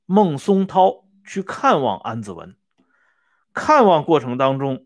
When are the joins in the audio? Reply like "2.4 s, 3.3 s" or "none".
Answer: none

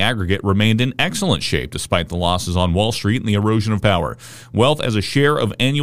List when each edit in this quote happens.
3.8 s

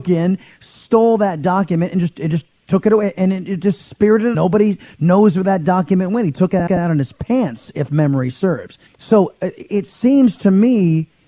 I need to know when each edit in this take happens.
4.3 s, 6.7 s, 8.9 s

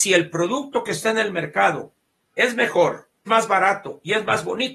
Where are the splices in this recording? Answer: 3.3 s

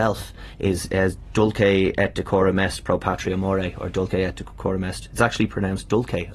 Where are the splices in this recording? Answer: none

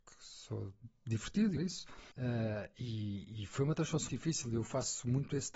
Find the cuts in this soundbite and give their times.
1.6 s, 2.1 s, 4.1 s

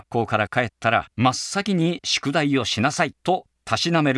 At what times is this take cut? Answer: 1.1 s, 3.2 s

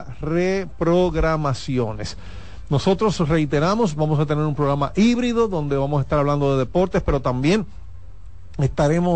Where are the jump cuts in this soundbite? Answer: none

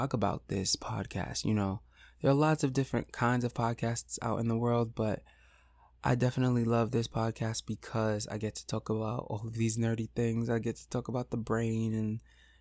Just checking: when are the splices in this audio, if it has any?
none

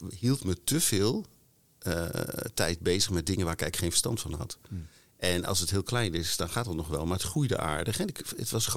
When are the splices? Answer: none

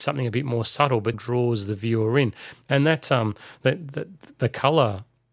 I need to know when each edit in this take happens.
1.1 s

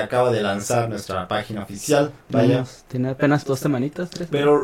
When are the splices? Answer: 2.2 s, 3.4 s

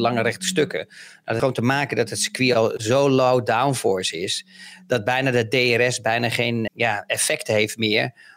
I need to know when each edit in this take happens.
1.4 s, 6.7 s

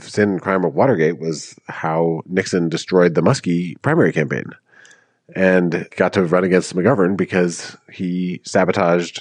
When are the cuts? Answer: none

